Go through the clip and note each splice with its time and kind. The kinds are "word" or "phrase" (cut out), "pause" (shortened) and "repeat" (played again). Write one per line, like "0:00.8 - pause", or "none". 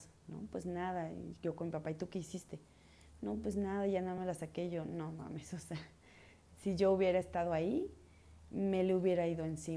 none